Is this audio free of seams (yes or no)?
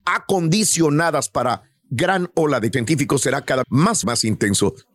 no